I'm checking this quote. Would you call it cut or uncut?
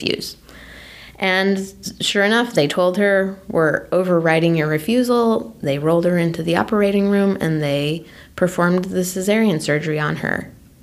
uncut